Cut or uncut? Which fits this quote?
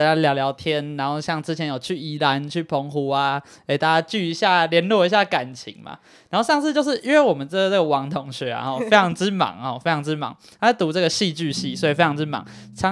uncut